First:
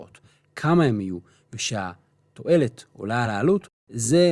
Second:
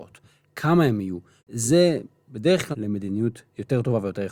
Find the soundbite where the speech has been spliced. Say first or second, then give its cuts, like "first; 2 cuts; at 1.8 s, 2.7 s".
second; 2 cuts; at 1.4 s, 2.7 s